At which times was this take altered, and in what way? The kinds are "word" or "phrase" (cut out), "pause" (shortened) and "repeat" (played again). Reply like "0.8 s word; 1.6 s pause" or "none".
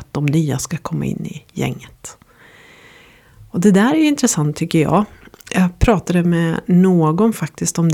none